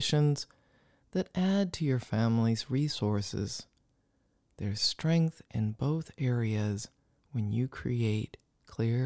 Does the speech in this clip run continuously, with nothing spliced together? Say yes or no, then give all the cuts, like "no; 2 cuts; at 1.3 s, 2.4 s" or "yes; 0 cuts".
yes; 0 cuts